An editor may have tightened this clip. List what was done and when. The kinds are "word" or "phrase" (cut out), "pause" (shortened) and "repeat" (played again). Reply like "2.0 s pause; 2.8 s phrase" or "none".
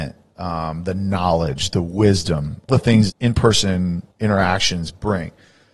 2.7 s word; 3.1 s word; 4.1 s pause